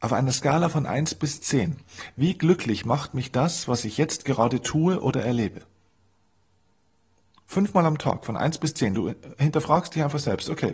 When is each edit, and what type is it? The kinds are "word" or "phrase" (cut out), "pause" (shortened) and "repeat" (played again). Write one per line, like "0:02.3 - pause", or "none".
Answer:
none